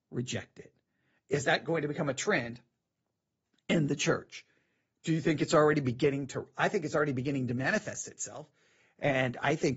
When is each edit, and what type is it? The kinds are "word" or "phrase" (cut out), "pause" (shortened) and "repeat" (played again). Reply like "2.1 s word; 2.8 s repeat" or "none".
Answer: none